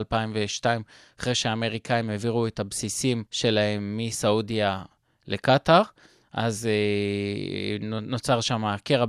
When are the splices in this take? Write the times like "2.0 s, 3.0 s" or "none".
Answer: 3.3 s